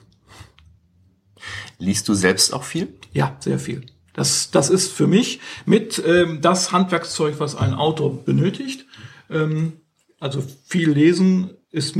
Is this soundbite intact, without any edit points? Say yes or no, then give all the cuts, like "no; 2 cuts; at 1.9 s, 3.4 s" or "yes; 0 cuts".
yes; 0 cuts